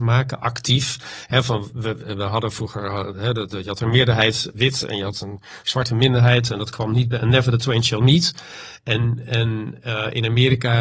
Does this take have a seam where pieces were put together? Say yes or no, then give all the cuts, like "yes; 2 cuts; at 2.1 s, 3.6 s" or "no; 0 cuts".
no; 0 cuts